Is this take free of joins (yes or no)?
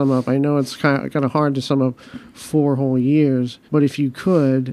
no